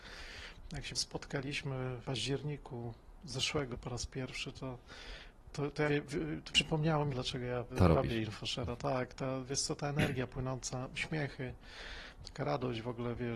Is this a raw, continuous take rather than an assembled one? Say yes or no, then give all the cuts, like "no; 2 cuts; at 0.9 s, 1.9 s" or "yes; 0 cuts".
no; 8 cuts; at 0.9 s, 2.0 s, 3.7 s, 5.5 s, 5.9 s, 6.5 s, 7.1 s, 7.7 s